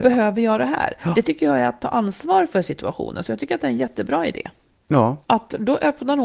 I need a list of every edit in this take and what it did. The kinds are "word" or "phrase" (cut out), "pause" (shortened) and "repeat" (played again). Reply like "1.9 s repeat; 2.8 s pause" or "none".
5.2 s pause